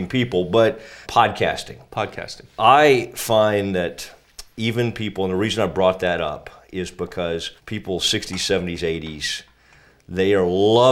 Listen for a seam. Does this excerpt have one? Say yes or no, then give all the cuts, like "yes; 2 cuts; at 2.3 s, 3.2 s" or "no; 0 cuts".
yes; 2 cuts; at 1.0 s, 7.6 s